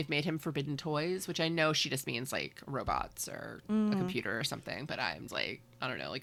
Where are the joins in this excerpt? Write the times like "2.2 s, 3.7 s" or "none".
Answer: 5.3 s

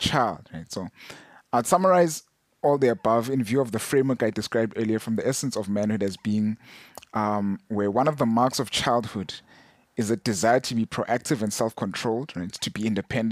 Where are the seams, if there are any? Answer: none

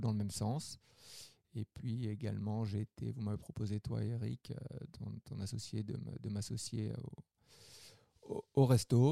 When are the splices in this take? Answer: none

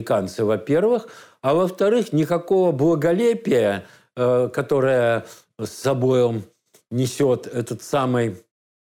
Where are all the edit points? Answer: none

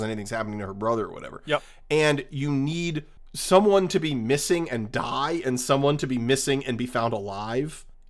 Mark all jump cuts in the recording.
none

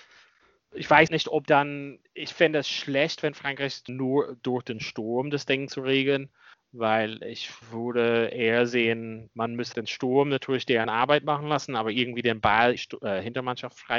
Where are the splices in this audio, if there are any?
1.1 s, 1.5 s, 2.1 s, 3.9 s, 6.5 s, 7.6 s, 9.7 s, 12.8 s

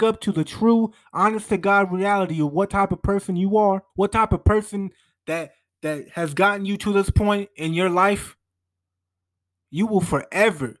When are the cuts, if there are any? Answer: 3.9 s

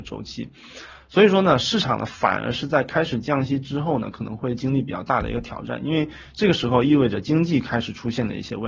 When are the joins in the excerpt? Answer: none

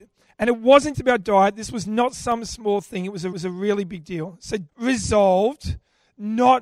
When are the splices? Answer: 0.9 s, 3.3 s, 4.7 s

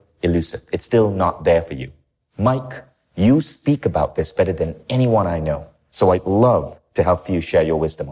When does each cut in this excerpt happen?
none

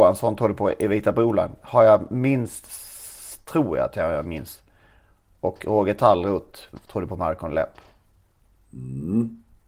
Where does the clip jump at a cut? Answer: none

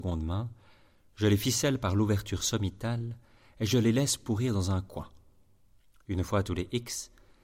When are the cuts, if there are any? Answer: none

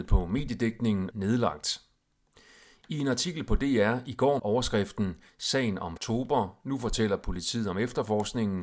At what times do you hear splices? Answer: 1.1 s, 4.4 s, 6.0 s

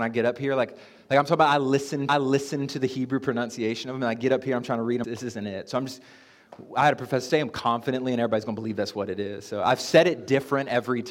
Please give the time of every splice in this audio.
2.1 s, 5.0 s, 7.3 s

